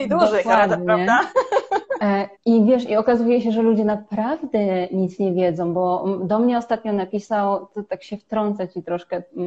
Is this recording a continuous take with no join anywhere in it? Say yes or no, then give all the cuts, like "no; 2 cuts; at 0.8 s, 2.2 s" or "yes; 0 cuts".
no; 1 cut; at 2.3 s